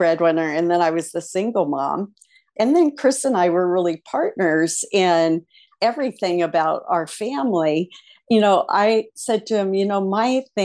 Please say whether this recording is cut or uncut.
uncut